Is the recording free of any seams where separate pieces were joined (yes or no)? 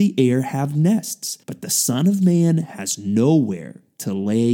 no